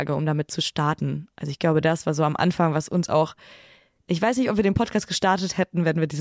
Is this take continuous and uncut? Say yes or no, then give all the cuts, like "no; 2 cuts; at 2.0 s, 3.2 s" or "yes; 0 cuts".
yes; 0 cuts